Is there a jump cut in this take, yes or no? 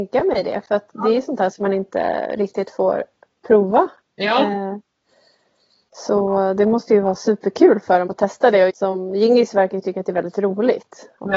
yes